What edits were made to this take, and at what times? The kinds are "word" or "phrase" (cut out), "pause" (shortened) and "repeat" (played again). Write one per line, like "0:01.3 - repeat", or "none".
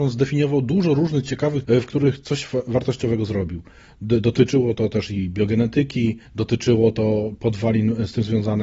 0:01.6 - word
0:06.3 - pause